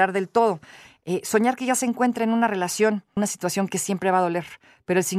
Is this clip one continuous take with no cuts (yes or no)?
yes